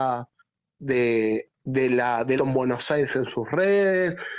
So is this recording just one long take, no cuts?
no; 2 cuts; at 1.6 s, 2.4 s

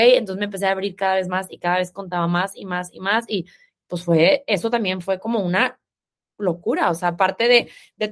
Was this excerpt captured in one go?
yes; 0 cuts

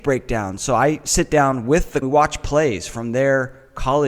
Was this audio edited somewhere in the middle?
yes; 1 cut; at 2.0 s

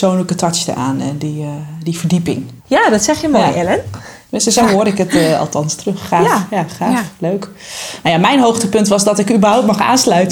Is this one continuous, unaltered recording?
no; 2 cuts; at 2.6 s, 4.2 s

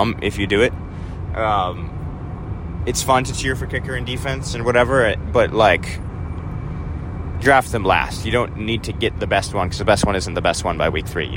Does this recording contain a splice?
no; 0 cuts

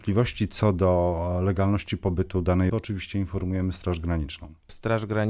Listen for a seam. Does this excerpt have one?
yes; 1 cut; at 2.7 s

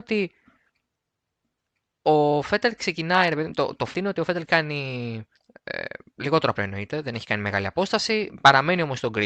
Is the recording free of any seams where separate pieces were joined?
no; 4 cuts; at 3.9 s, 4.4 s, 5.4 s, 6.6 s

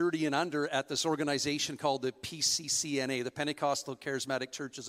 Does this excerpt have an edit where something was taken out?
no; 0 cuts

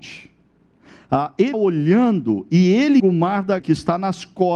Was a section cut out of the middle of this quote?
yes; 3 cuts; at 1.5 s, 3.0 s, 3.6 s

